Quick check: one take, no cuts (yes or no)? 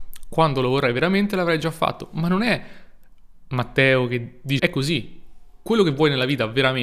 no